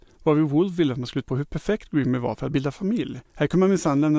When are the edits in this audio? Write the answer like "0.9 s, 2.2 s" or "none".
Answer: 1.2 s, 3.2 s